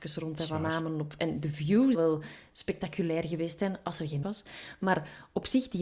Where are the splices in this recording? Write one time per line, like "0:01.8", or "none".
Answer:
0:01.9
0:04.2